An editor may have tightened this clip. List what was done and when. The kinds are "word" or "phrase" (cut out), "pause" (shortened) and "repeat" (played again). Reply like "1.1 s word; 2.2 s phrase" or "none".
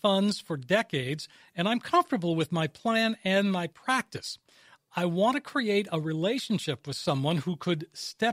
none

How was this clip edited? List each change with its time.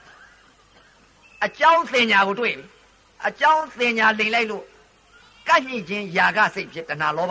none

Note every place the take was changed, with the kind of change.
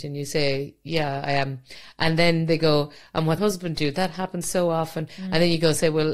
3.4 s word

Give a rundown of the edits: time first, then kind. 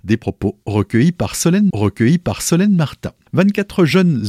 1.7 s repeat

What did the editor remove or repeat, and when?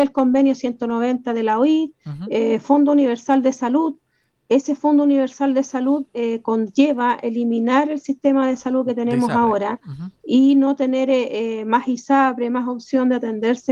none

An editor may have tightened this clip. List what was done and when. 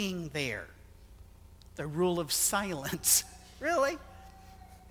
none

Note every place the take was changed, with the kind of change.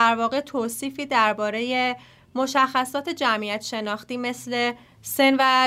none

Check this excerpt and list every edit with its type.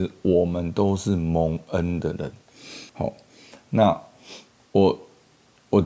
2.9 s pause

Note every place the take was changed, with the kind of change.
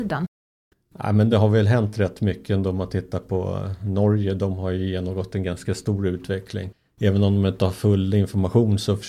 none

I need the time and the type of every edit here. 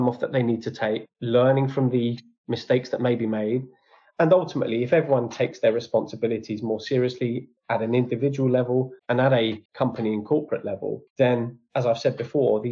7.6 s pause; 9.0 s pause; 9.7 s pause; 11.1 s pause

